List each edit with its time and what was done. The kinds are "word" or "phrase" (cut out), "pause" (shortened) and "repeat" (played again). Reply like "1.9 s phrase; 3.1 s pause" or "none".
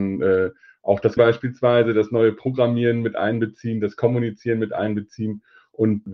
1.2 s word